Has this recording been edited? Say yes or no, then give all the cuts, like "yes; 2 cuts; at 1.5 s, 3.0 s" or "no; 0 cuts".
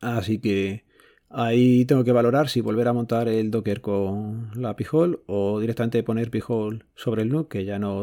yes; 1 cut; at 6.9 s